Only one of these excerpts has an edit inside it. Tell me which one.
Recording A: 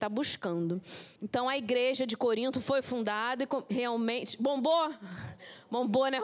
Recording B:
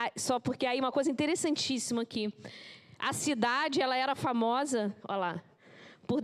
A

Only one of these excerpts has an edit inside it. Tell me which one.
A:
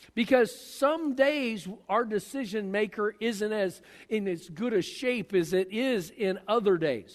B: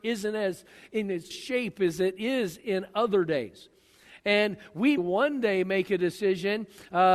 B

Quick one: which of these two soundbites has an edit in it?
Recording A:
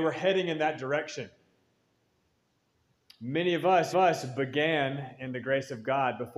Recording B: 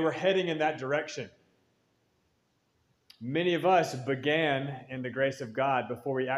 A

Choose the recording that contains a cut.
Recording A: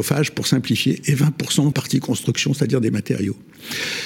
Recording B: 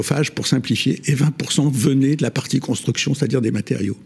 A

